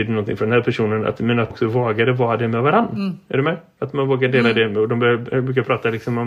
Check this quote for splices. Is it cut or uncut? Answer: cut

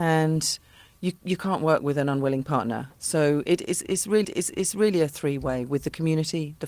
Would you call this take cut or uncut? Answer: cut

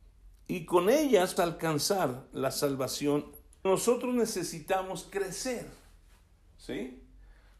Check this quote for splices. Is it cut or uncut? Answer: cut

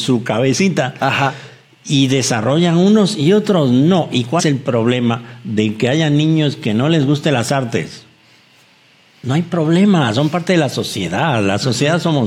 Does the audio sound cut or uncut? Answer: cut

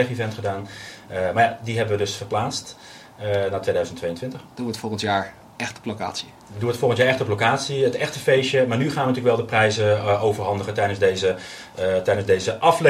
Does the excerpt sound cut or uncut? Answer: uncut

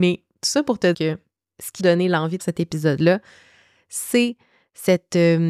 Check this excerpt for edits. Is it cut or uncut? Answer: cut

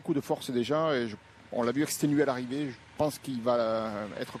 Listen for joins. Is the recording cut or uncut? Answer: uncut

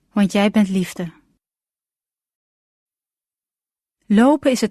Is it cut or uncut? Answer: uncut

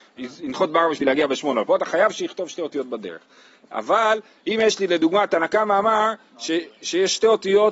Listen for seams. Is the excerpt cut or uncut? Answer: uncut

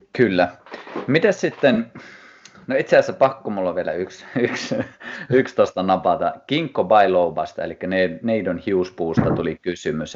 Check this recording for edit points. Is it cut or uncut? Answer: uncut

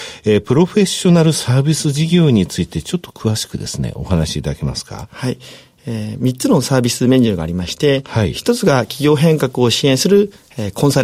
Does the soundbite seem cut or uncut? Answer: uncut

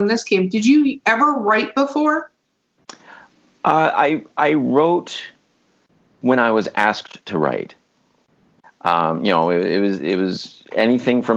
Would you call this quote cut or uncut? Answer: uncut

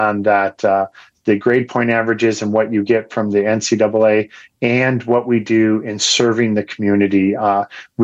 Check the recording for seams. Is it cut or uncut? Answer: uncut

